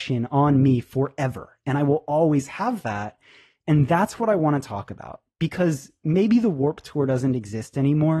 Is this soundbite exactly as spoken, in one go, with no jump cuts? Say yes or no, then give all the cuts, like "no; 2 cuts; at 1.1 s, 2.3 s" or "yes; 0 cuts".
yes; 0 cuts